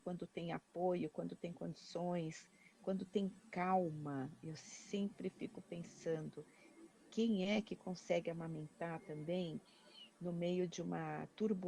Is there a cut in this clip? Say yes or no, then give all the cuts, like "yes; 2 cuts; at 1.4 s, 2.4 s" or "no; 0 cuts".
no; 0 cuts